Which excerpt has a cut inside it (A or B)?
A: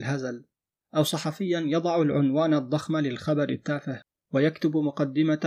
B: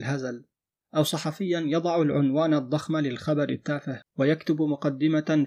B